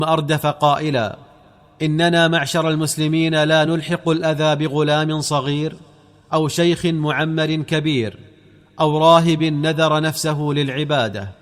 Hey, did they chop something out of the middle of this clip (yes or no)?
no